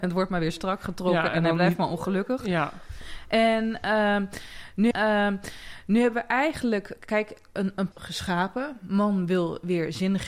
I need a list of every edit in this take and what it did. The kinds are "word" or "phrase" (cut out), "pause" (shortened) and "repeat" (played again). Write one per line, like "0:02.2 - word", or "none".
0:04.9 - repeat
0:07.9 - word